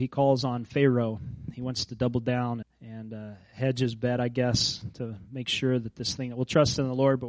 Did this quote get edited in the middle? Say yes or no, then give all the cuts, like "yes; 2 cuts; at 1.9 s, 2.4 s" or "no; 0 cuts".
yes; 1 cut; at 2.6 s